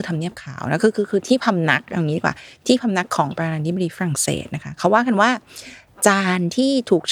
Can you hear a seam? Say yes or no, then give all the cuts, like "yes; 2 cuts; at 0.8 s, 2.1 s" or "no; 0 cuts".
no; 0 cuts